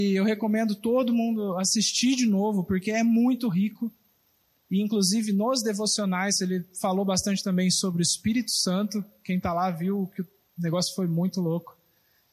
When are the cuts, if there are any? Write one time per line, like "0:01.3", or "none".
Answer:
none